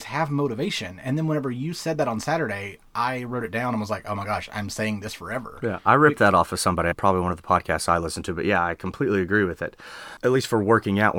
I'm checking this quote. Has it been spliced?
no; 0 cuts

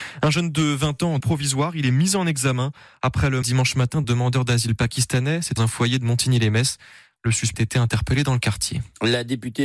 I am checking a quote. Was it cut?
yes; 5 cuts; at 1.2 s, 3.4 s, 4.0 s, 5.6 s, 7.5 s

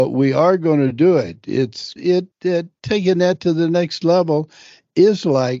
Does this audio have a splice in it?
yes; 2 cuts; at 2.0 s, 2.3 s

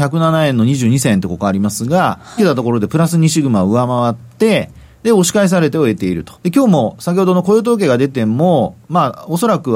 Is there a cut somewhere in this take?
yes; 2 cuts; at 2.4 s, 6.3 s

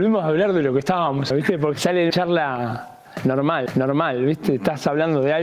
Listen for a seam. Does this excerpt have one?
yes; 4 cuts; at 1.3 s, 1.7 s, 2.1 s, 3.7 s

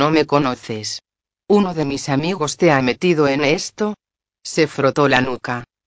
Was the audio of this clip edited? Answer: no; 0 cuts

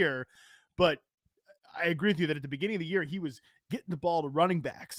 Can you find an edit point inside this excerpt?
no; 0 cuts

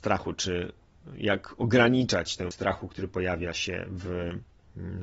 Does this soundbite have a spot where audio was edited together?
yes; 1 cut; at 2.5 s

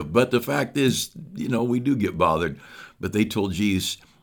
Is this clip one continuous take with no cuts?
yes; 0 cuts

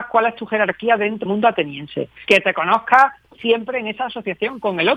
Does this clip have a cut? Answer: yes; 2 cuts; at 1.3 s, 2.3 s

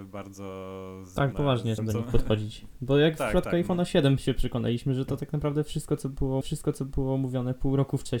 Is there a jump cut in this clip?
yes; 3 cuts; at 1.3 s, 1.8 s, 6.4 s

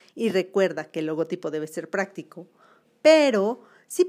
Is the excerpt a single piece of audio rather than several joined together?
yes; 0 cuts

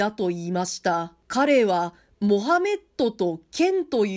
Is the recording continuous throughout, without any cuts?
no; 1 cut; at 1.2 s

